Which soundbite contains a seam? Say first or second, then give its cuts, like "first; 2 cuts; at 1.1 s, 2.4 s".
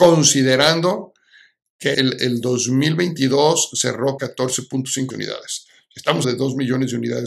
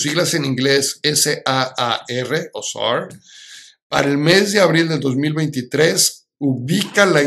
first; 4 cuts; at 1.9 s, 4.2 s, 5.1 s, 6.2 s